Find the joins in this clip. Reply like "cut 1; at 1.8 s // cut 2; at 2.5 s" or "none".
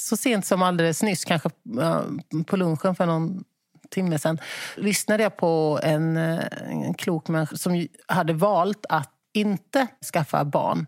cut 1; at 4.8 s // cut 2; at 7.5 s // cut 3; at 9.2 s

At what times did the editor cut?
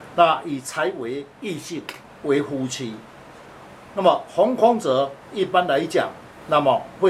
cut 1; at 1.3 s

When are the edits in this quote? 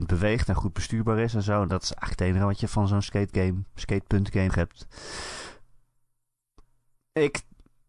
cut 1; at 4.5 s

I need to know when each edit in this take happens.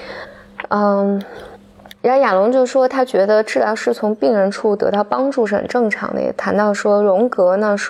cut 1; at 1.9 s

